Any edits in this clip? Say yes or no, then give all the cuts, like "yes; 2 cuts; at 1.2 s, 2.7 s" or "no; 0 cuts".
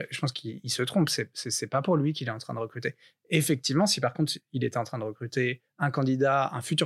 no; 0 cuts